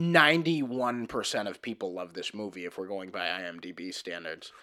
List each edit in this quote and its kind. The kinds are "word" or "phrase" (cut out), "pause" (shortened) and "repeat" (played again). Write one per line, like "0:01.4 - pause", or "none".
none